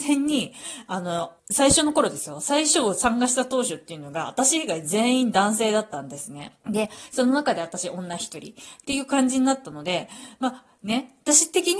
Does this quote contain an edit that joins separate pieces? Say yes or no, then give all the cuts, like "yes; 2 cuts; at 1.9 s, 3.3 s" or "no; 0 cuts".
yes; 2 cuts; at 1.4 s, 6.6 s